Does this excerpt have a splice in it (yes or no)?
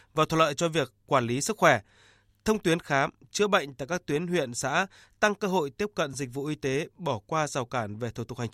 no